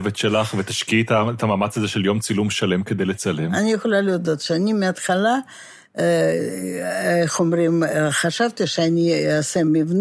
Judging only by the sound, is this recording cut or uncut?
uncut